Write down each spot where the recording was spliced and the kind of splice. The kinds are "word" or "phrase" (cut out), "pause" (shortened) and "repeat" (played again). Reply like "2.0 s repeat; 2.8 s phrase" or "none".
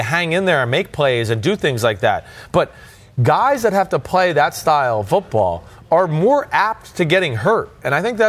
none

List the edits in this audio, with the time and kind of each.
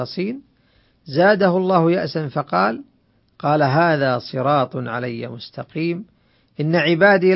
none

